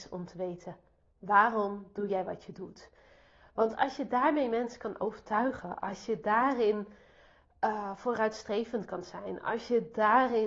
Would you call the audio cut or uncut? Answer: uncut